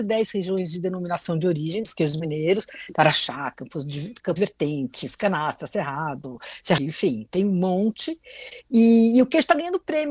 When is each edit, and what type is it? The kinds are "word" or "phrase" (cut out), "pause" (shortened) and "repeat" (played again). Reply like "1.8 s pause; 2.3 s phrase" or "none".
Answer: 4.4 s word; 6.8 s phrase